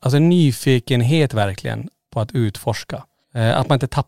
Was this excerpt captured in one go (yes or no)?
yes